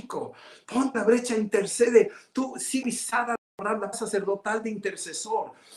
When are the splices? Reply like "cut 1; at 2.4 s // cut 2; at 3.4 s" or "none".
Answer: cut 1; at 0.9 s // cut 2; at 2.8 s // cut 3; at 3.9 s

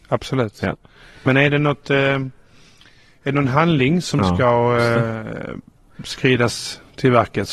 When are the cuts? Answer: none

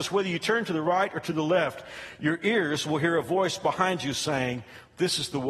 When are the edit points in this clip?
none

